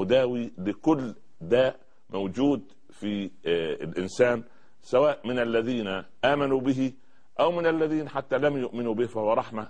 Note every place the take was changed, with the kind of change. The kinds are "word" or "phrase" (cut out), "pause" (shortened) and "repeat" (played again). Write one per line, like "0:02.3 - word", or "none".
none